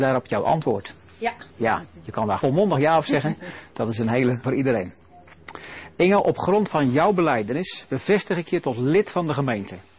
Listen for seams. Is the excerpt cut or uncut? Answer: cut